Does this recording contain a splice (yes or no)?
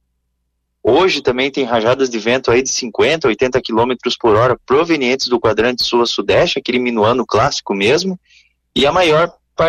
no